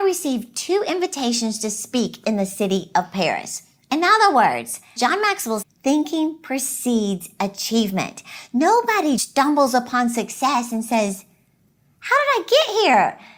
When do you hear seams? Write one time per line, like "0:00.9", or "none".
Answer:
0:05.0
0:05.6
0:09.2